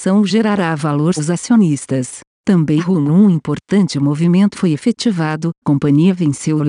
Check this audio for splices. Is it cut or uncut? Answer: cut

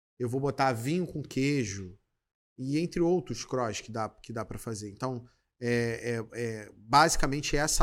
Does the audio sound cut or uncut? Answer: uncut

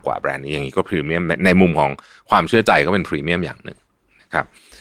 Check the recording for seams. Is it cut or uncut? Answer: uncut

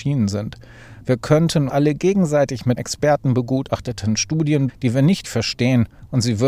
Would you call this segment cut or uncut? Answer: cut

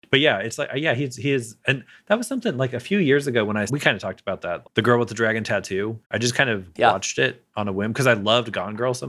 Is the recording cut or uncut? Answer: cut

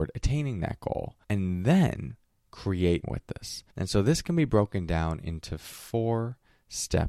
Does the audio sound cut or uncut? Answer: cut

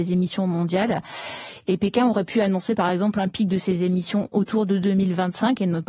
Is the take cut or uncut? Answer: uncut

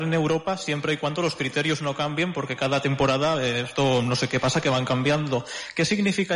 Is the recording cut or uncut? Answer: uncut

